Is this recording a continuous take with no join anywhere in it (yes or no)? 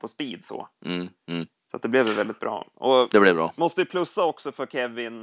yes